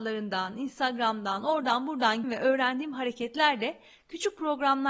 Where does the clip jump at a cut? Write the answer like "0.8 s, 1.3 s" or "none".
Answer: 2.2 s